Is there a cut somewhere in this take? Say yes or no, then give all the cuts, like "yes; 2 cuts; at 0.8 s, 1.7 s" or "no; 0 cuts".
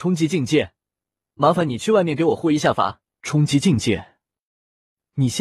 yes; 1 cut; at 3.1 s